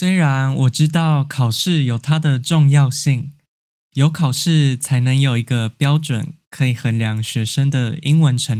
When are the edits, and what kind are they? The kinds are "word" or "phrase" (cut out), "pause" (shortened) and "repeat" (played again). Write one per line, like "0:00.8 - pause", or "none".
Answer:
none